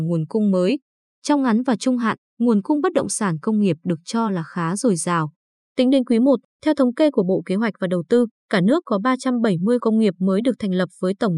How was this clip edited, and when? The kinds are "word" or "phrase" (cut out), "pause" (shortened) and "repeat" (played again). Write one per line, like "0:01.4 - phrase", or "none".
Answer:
0:09.8 - word